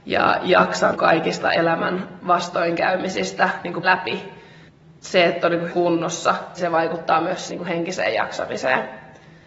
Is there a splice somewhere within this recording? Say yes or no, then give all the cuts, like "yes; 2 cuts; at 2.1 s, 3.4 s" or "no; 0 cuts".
yes; 5 cuts; at 0.9 s, 3.8 s, 5.7 s, 6.6 s, 7.5 s